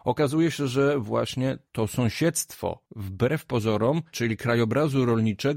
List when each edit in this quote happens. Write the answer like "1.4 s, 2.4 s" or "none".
1.7 s, 2.9 s, 4.1 s